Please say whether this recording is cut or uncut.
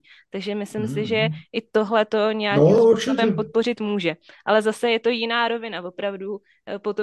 uncut